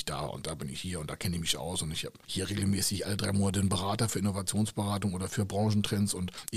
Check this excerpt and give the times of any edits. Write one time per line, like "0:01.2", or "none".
none